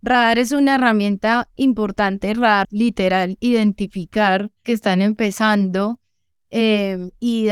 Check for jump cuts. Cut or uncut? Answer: cut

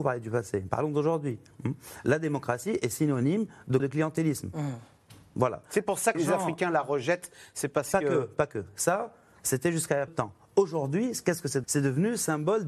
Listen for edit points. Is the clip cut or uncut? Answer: cut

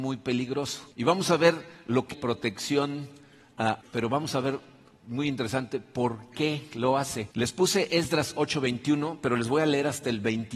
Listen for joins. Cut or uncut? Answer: cut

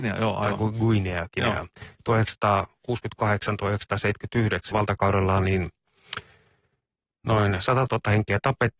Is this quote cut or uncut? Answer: cut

